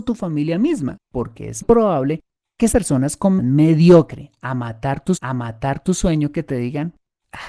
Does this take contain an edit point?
yes; 5 cuts; at 1.1 s, 1.6 s, 2.7 s, 3.4 s, 5.2 s

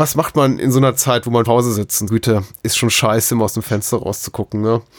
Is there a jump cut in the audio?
yes; 2 cuts; at 1.5 s, 2.1 s

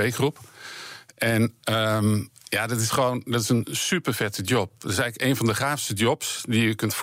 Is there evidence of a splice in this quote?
no; 0 cuts

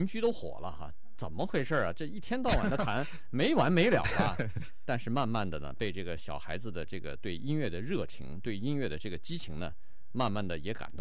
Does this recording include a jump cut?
no; 0 cuts

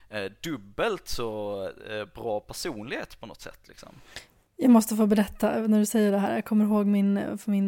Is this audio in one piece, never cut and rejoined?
yes; 0 cuts

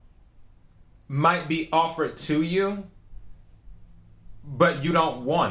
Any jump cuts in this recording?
no; 0 cuts

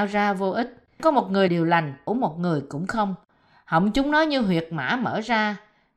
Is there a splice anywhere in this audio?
yes; 3 cuts; at 1.0 s, 1.5 s, 2.1 s

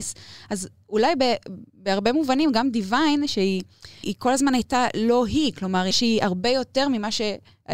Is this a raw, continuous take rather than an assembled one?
no; 2 cuts; at 4.0 s, 5.9 s

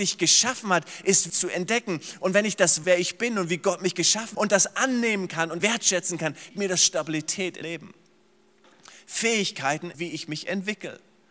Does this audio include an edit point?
yes; 7 cuts; at 1.3 s, 2.8 s, 4.3 s, 5.6 s, 6.5 s, 7.6 s, 9.9 s

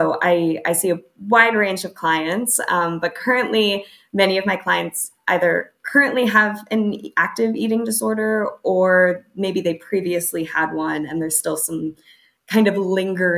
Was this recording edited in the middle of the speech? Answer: no; 0 cuts

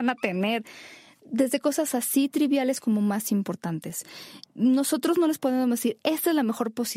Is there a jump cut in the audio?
no; 0 cuts

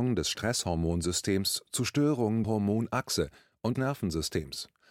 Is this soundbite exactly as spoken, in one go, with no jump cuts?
no; 2 cuts; at 2.4 s, 3.7 s

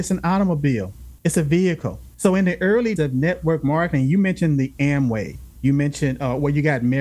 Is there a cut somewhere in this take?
yes; 3 cuts; at 1.2 s, 2.1 s, 3.0 s

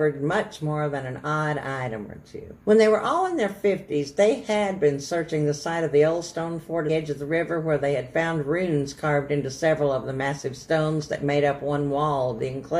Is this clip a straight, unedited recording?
no; 2 cuts; at 2.6 s, 6.9 s

